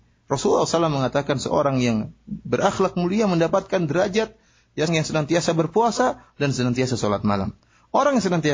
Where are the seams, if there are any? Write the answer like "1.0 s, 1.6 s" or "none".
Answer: 4.9 s